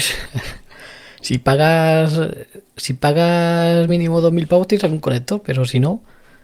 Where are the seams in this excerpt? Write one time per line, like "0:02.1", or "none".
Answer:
none

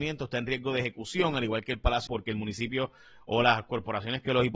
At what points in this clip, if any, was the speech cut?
0:02.1

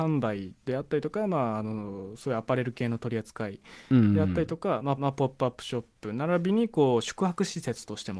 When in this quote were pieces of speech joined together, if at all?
0:05.0

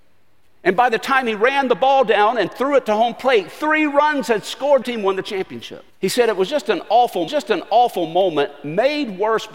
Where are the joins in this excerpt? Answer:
0:04.8
0:05.9
0:07.3

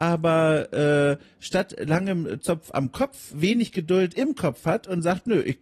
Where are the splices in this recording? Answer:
0:03.3

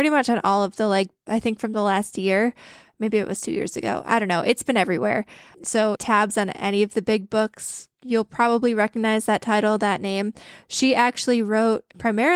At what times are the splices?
0:01.3
0:06.0
0:07.9

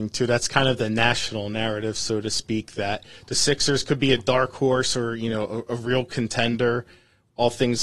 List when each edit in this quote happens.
none

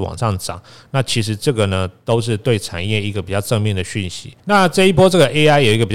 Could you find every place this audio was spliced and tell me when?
0:04.4

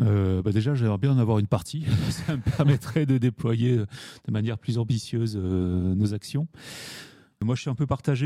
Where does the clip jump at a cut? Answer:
none

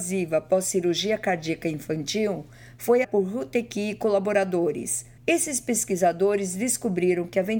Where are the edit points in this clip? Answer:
0:03.0
0:05.2

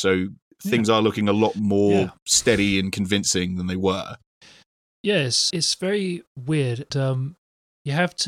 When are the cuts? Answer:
0:04.3
0:05.5
0:06.9

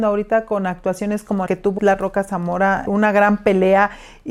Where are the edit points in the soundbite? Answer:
0:01.5
0:01.8
0:02.9

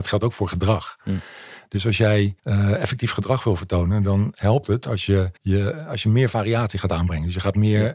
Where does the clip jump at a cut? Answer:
0:02.4
0:05.4

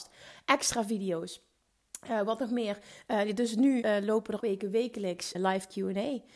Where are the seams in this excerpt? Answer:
0:03.8
0:04.4
0:05.3

